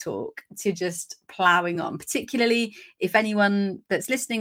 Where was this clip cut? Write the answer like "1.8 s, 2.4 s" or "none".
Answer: none